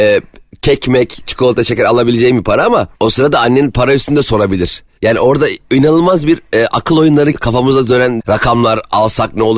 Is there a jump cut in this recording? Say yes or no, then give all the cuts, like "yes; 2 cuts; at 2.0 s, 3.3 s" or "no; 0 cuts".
yes; 3 cuts; at 2.9 s, 7.3 s, 8.2 s